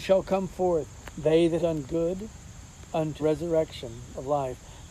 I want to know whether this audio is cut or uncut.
cut